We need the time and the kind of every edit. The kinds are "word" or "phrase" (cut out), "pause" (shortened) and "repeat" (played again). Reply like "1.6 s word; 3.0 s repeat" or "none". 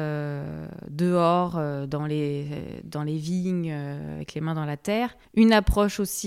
5.2 s pause